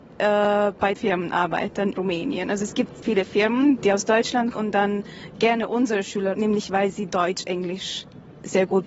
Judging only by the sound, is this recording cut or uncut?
cut